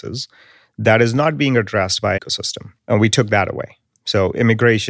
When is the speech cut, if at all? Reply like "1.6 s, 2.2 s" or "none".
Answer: 2.2 s, 2.8 s